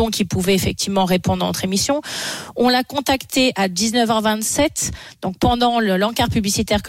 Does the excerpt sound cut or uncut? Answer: uncut